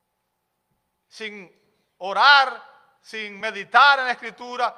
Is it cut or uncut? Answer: uncut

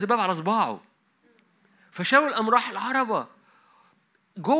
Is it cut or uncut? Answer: uncut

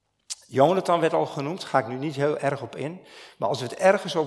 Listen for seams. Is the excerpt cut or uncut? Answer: uncut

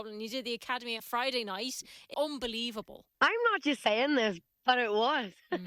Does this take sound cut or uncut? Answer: cut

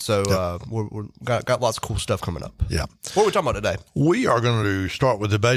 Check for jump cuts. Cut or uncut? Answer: uncut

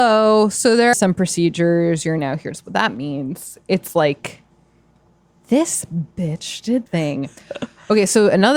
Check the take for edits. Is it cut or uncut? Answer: cut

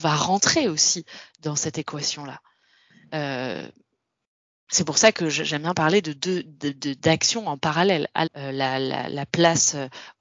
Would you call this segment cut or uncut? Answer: cut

